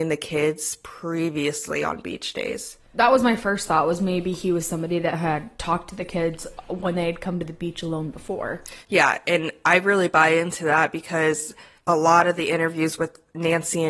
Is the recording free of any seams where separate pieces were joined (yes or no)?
yes